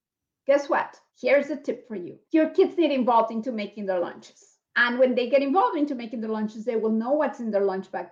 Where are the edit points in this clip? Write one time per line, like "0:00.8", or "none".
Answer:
0:01.1
0:02.2
0:04.6